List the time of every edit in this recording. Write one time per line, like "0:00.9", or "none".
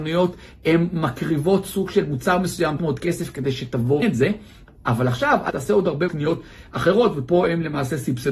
0:02.8
0:04.0
0:05.5
0:06.1